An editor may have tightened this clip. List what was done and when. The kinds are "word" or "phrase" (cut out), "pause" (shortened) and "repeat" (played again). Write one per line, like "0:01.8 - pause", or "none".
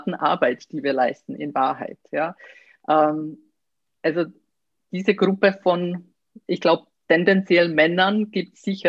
none